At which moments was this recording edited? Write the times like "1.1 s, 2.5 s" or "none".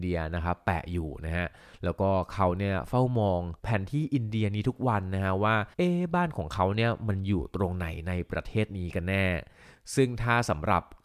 3.6 s, 5.7 s